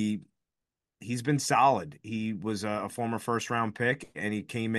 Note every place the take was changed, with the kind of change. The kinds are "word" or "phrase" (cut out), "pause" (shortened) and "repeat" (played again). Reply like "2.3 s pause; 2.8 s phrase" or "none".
none